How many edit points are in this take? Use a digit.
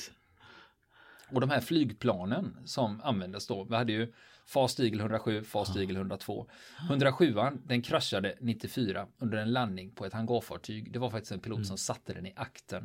0